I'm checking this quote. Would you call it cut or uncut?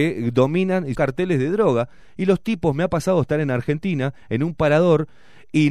cut